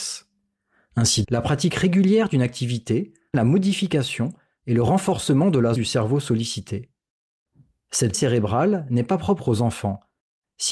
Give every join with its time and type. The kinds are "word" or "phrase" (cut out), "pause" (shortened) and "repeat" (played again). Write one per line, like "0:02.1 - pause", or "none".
0:01.2 - word
0:03.3 - word
0:05.8 - word
0:08.1 - word